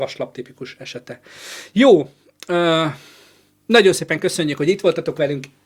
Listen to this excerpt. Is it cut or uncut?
uncut